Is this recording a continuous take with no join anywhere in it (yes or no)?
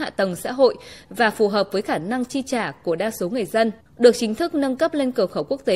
no